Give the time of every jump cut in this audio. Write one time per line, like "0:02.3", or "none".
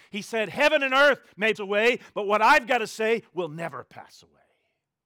0:01.5